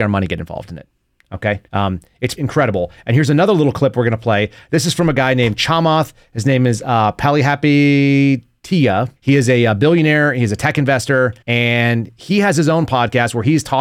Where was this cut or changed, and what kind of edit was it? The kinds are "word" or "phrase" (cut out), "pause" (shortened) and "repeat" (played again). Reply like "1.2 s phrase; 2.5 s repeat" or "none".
1.7 s pause; 2.4 s word; 9.2 s pause; 11.4 s pause

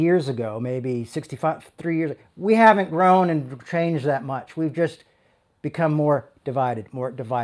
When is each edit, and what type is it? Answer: none

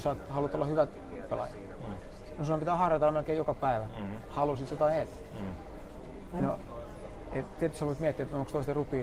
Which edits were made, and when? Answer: 1.3 s word

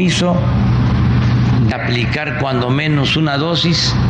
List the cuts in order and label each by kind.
1.7 s word

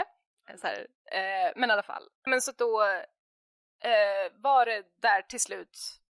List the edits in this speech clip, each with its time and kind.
2.3 s word

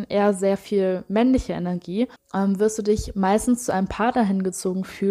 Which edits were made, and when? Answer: 2.2 s pause

